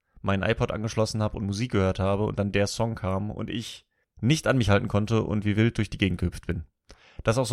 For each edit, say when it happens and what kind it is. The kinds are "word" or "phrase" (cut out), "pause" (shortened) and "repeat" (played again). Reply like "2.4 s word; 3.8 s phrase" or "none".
4.0 s pause